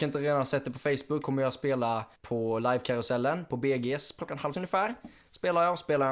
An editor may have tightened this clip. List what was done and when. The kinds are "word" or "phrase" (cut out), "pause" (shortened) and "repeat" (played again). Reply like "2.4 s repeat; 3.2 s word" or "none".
1.2 s word; 2.1 s pause; 4.2 s word; 4.5 s word